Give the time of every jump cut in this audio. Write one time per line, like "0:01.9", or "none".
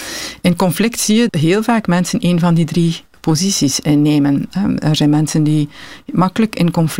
0:01.3